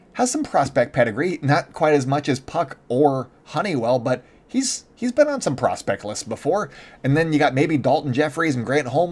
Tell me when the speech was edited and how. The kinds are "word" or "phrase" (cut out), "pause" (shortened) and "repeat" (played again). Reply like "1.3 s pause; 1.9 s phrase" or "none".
none